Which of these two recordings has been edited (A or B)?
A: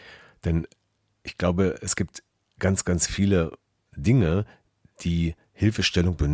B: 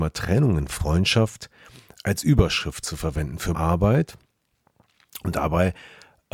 B